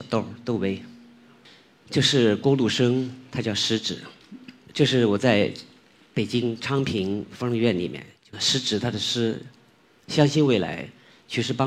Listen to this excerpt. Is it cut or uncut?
cut